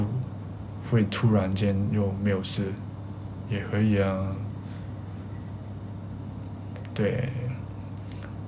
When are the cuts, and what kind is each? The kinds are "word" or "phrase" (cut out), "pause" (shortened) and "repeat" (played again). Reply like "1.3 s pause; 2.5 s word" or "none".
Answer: 3.5 s phrase